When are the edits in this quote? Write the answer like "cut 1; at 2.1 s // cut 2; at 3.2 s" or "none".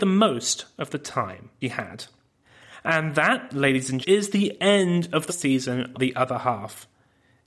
cut 1; at 1.6 s // cut 2; at 4.0 s // cut 3; at 5.3 s // cut 4; at 5.9 s